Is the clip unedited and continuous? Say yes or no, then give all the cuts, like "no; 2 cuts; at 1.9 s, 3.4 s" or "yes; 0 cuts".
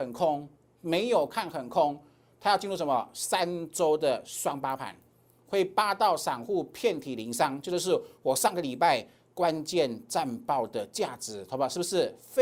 yes; 0 cuts